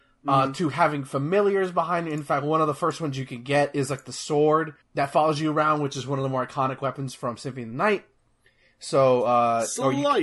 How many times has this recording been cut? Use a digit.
1